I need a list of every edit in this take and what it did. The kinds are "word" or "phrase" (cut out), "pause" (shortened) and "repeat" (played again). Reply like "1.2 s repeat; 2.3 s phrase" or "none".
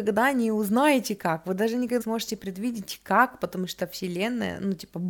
2.0 s word